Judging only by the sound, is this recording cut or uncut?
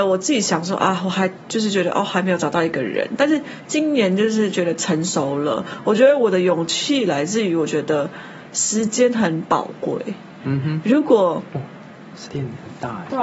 cut